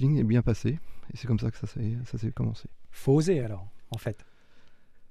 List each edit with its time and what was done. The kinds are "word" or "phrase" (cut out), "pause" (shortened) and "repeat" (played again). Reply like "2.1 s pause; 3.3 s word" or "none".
none